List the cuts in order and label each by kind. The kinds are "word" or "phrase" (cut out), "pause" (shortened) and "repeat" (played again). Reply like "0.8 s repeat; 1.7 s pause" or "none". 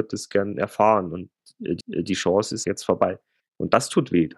1.8 s repeat; 2.6 s word; 3.4 s pause

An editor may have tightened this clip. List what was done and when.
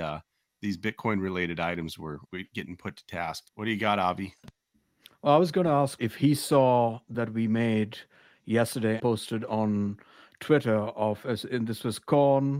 2.2 s word; 3.5 s pause; 4.7 s pause; 6.0 s word; 7.1 s word; 9.0 s word

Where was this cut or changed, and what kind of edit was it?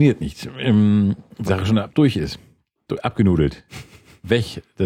1.5 s word

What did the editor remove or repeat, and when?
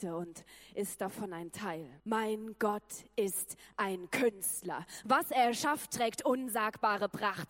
2.0 s pause

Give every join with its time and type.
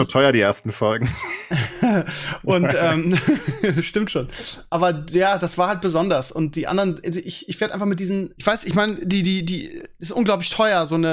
8.4 s word

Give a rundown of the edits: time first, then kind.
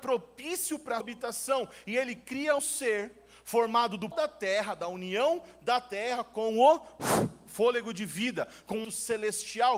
1.0 s word; 2.6 s word; 4.1 s word; 8.8 s word

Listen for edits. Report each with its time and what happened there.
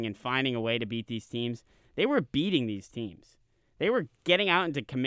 none

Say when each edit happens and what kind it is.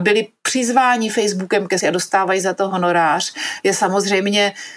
1.8 s word

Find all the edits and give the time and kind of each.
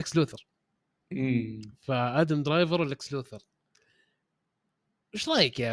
none

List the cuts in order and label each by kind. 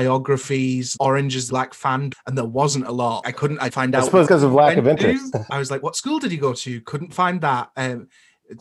1.0 s word; 1.5 s word; 2.1 s word; 3.2 s word; 3.7 s word; 4.3 s word; 5.5 s word

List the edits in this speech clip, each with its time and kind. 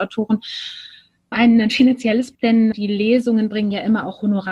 1.3 s word; 2.3 s word; 2.7 s word

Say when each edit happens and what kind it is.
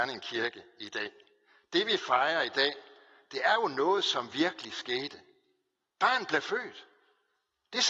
none

